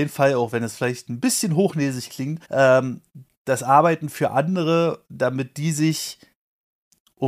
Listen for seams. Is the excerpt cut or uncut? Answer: cut